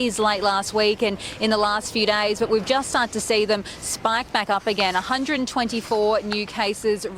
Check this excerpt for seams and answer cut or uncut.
uncut